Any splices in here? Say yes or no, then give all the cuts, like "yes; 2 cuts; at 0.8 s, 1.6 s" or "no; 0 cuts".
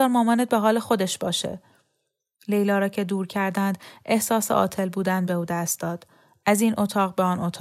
no; 0 cuts